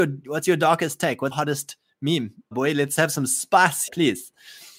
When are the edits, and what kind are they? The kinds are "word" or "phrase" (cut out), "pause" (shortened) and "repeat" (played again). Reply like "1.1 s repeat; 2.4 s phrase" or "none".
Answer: 1.3 s word; 2.5 s word; 3.9 s word

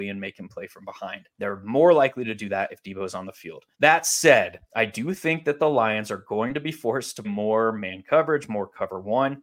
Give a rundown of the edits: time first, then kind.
1.3 s pause; 3.7 s pause; 4.7 s pause; 7.2 s word

